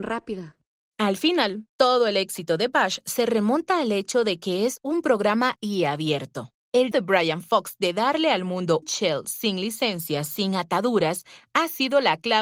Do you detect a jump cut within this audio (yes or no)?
yes